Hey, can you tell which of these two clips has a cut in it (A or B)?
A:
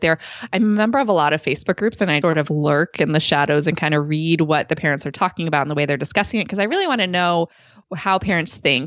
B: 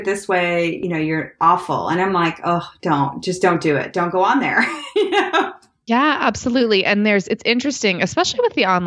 A